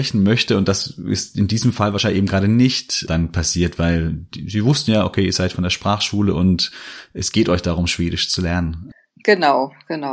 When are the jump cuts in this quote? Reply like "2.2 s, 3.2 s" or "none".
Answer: none